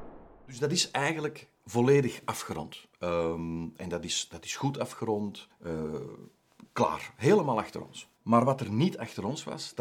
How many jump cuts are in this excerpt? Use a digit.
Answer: 2